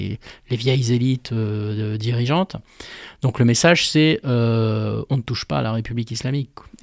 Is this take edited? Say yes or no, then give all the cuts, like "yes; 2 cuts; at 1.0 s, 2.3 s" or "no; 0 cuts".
no; 0 cuts